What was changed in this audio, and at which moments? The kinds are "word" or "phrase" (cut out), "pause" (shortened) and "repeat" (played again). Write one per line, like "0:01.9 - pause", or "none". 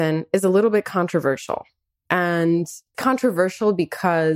0:02.9 - word

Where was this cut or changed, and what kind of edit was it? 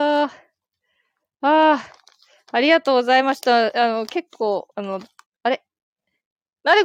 0:04.7 - pause
0:05.3 - pause

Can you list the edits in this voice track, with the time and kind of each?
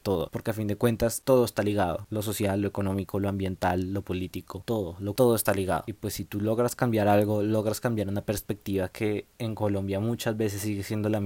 0:05.2 - word
0:09.3 - pause

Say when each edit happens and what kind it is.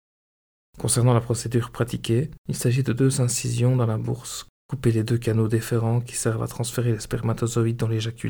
0:02.4 - pause

